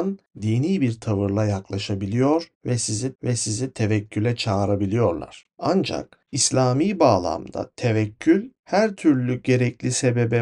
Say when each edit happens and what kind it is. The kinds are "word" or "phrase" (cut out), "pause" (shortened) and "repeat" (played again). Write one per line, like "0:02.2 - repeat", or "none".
0:03.2 - repeat

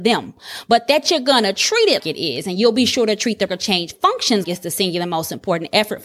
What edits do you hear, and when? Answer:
0:02.0 - word
0:03.5 - word
0:04.4 - word

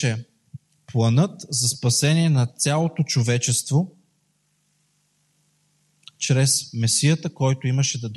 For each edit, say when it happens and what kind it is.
none

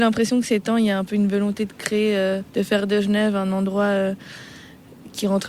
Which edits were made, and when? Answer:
0:02.5 - pause

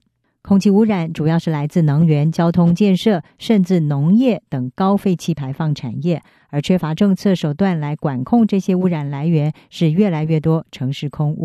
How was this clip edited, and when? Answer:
none

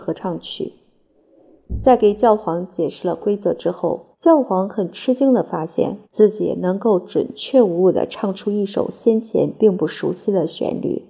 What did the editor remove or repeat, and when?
0:04.1 - pause
0:06.0 - pause

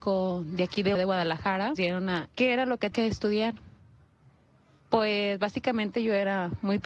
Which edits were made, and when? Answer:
0:01.0 - word
0:01.8 - word
0:02.3 - word
0:02.9 - word

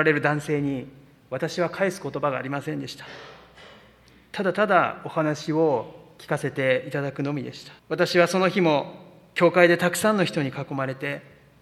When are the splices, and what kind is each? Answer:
0:07.8 - pause

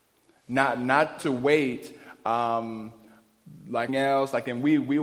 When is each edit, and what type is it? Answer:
0:01.2 - word
0:03.9 - phrase

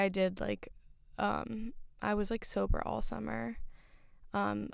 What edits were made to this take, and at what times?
none

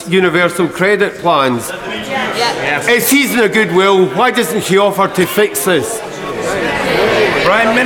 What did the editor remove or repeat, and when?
0:03.0 - word

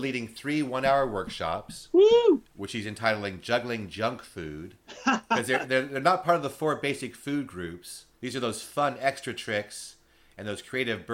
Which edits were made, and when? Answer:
0:08.1 - pause

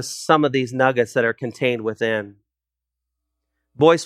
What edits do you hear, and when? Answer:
none

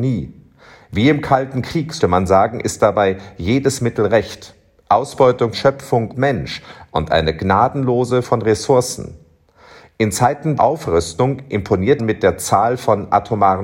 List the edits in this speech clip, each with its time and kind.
0:02.0 - word
0:05.5 - word
0:06.1 - word
0:08.2 - word
0:10.6 - word
0:12.0 - word

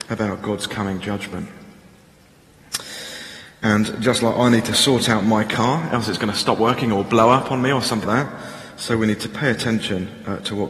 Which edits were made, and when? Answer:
0:08.0 - word

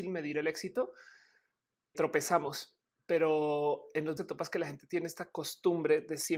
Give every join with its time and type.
0:01.9 - word
0:04.2 - word

